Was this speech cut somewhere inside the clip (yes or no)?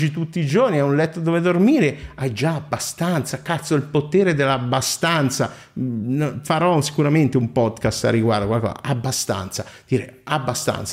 no